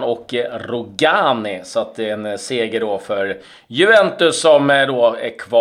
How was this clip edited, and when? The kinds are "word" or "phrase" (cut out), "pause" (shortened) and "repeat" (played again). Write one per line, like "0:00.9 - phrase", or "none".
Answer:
none

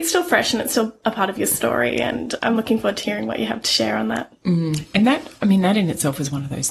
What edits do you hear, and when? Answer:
0:02.4 - word

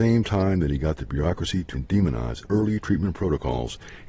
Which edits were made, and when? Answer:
0:01.7 - word
0:02.4 - word

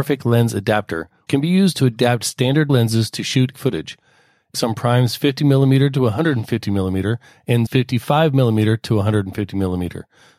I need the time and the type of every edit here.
0:01.3 - word
0:02.7 - word
0:03.5 - word
0:04.5 - word
0:07.7 - word

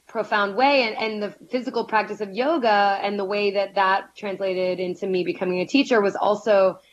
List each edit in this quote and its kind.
none

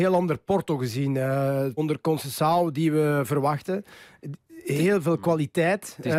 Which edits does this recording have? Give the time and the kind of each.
0:01.8 - word

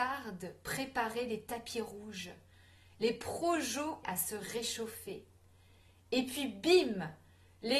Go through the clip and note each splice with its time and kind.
0:04.0 - word

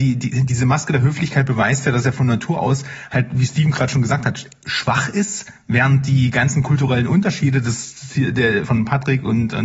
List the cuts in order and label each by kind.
0:08.6 - word

